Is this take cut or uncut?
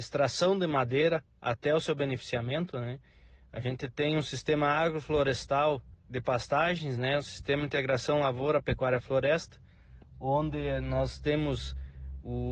uncut